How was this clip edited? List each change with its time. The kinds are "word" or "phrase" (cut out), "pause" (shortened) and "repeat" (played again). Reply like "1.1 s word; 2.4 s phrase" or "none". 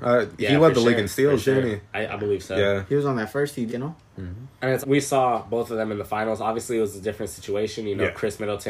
1.9 s pause; 3.7 s word; 4.8 s word